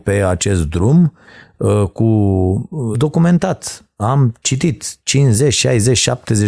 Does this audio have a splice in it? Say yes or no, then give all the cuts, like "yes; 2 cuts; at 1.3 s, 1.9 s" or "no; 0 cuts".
yes; 1 cut; at 2.9 s